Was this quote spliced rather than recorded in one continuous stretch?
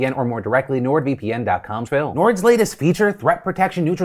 yes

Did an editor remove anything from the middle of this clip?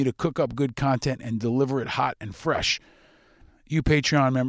no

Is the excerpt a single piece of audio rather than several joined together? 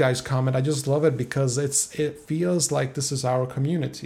yes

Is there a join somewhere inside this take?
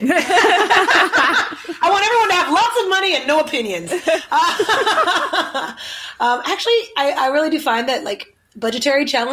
no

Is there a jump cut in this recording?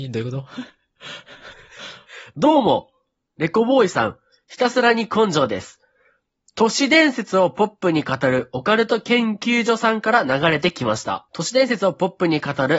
yes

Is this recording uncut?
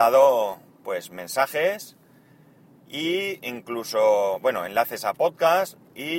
yes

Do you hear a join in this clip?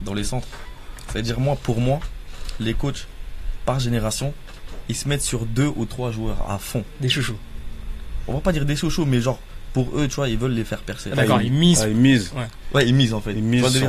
no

